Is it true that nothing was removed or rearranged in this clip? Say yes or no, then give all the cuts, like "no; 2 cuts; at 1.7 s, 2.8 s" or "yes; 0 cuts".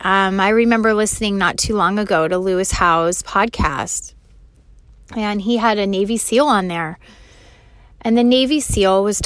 yes; 0 cuts